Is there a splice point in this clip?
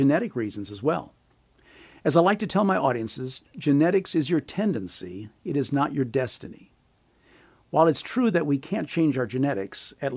no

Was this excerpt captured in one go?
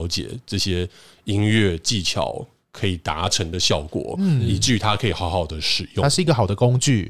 yes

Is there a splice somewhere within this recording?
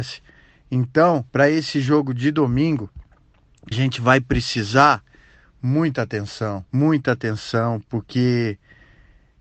yes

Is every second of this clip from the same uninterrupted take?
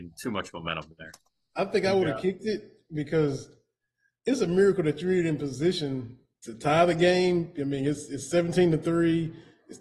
yes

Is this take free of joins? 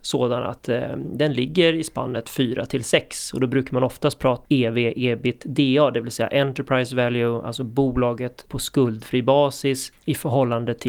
no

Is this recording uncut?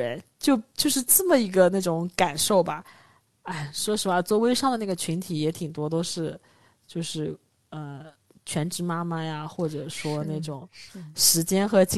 yes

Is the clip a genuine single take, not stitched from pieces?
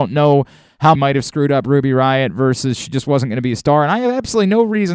no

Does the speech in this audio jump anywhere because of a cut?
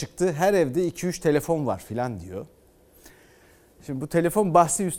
no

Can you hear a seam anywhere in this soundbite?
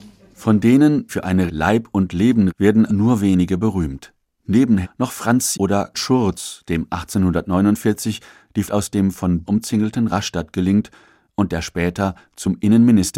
yes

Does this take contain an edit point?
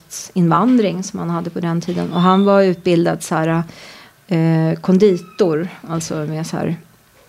no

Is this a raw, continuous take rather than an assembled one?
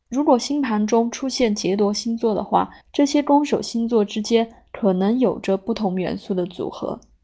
no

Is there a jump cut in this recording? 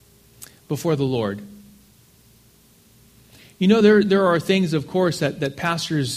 no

